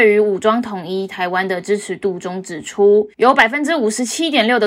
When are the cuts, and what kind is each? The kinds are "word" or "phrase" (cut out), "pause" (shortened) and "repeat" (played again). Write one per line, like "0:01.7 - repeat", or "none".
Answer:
0:03.1 - pause